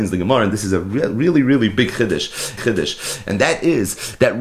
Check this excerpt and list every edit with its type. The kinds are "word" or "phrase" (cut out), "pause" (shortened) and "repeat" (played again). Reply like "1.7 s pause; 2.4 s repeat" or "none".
2.6 s repeat